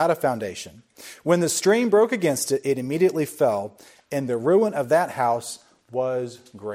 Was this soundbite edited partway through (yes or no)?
no